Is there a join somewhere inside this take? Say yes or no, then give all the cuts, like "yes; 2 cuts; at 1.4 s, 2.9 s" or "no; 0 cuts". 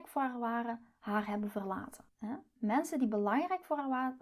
yes; 1 cut; at 2.1 s